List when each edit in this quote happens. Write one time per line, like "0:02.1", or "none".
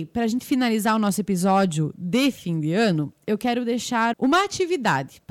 0:04.1